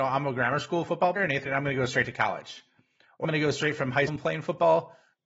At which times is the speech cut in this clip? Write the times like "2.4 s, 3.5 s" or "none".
1.2 s, 1.5 s, 3.2 s, 4.1 s